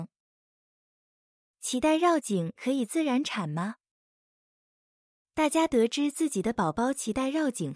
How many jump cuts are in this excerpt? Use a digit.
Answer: 0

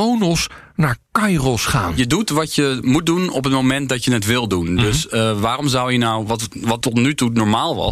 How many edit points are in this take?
0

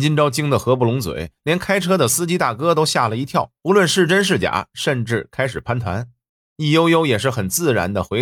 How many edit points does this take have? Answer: 2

